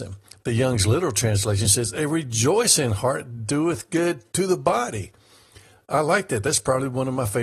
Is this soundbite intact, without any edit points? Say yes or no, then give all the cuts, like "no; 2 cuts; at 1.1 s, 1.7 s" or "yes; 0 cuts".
yes; 0 cuts